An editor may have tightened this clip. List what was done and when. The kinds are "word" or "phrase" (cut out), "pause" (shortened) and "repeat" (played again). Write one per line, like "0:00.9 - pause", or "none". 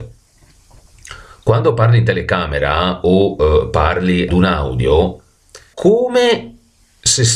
0:04.3 - word
0:05.7 - word